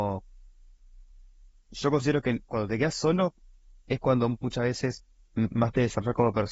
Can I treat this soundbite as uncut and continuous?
yes; 0 cuts

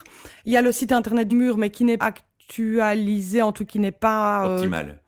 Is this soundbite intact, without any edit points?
no; 3 cuts; at 1.3 s, 2.0 s, 3.7 s

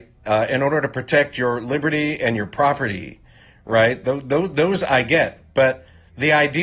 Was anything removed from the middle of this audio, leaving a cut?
no; 0 cuts

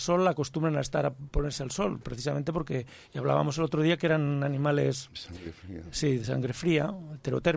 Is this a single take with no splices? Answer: yes; 0 cuts

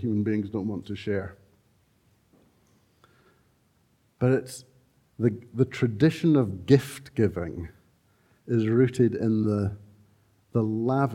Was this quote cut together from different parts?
no; 0 cuts

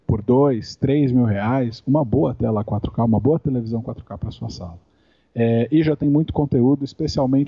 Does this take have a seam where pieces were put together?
no; 0 cuts

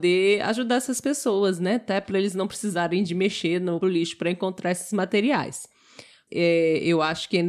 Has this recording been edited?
yes; 2 cuts; at 3.8 s, 6.3 s

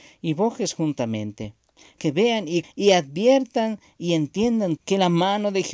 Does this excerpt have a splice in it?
yes; 3 cuts; at 2.0 s, 2.6 s, 4.8 s

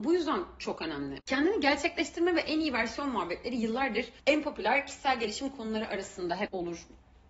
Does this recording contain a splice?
yes; 1 cut; at 4.2 s

